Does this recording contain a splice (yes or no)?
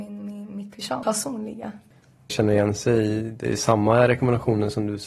yes